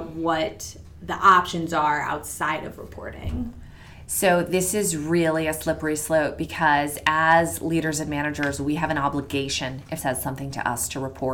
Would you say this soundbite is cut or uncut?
cut